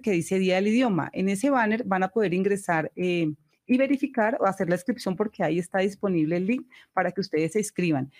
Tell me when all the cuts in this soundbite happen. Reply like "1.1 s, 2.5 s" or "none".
none